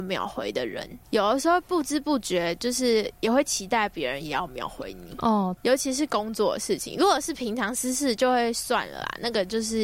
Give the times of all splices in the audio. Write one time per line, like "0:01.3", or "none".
0:05.6